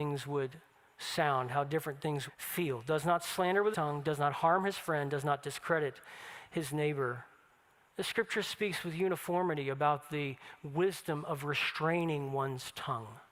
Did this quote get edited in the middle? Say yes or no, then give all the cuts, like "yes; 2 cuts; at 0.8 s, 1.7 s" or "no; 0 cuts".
yes; 2 cuts; at 2.3 s, 3.7 s